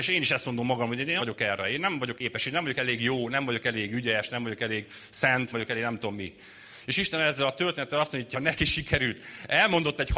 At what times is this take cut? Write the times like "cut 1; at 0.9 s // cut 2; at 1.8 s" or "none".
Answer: cut 1; at 1.2 s // cut 2; at 2.2 s // cut 3; at 5.5 s // cut 4; at 8.3 s

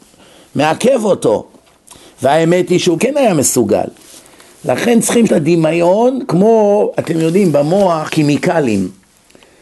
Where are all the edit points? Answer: cut 1; at 3.0 s // cut 2; at 5.3 s // cut 3; at 8.1 s

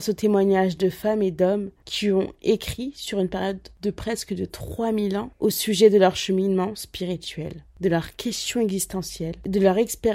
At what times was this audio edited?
none

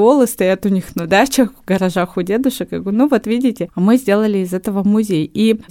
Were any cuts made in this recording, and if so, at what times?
none

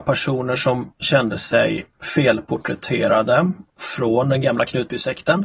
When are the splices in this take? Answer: cut 1; at 3.7 s

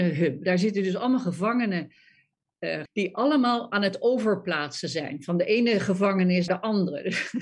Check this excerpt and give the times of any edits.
cut 1; at 2.9 s // cut 2; at 6.5 s

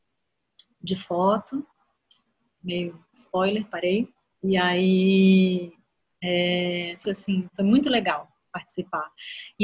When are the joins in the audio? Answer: cut 1; at 3.1 s // cut 2; at 7.0 s

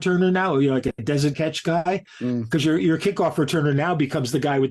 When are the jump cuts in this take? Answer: cut 1; at 1.3 s

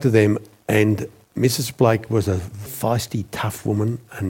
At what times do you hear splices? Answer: cut 1; at 2.7 s

